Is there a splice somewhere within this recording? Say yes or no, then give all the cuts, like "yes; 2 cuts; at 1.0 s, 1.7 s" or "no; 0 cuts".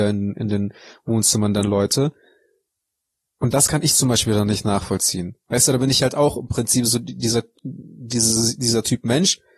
no; 0 cuts